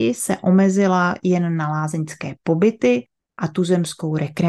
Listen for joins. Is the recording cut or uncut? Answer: uncut